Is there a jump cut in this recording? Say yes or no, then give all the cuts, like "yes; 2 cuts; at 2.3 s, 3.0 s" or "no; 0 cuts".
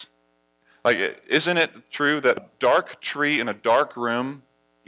yes; 1 cut; at 2.4 s